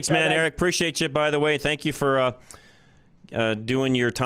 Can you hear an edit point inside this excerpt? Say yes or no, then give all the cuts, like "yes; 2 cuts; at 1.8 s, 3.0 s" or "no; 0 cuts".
no; 0 cuts